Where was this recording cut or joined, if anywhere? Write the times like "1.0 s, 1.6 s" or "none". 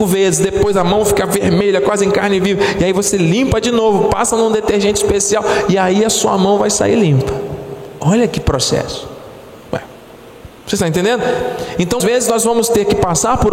12.0 s